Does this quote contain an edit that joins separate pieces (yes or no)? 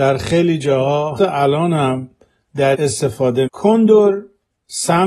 yes